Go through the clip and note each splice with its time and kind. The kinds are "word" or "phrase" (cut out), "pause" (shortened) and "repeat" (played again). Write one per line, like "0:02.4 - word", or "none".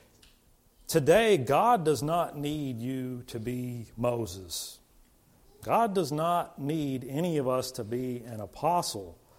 none